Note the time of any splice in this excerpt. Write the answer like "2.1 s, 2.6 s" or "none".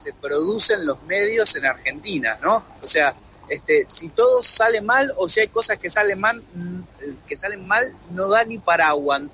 none